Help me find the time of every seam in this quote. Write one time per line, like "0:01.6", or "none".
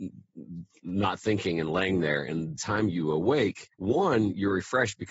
0:02.6
0:03.7